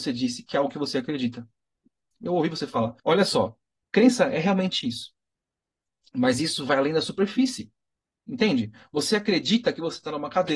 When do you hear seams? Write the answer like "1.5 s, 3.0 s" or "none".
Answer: 2.2 s, 3.0 s